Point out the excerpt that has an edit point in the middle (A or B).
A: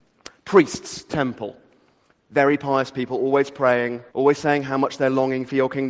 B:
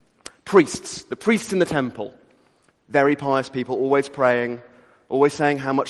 A